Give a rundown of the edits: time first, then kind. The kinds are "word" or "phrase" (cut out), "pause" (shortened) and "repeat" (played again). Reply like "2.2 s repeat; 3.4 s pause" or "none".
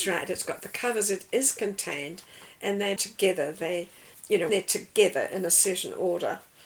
3.0 s word; 4.1 s word; 4.5 s word